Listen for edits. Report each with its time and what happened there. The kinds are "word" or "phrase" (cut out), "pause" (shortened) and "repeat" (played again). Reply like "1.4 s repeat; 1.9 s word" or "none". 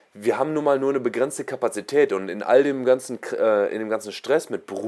none